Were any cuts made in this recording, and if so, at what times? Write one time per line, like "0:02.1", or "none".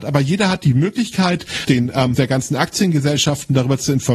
0:01.6
0:02.1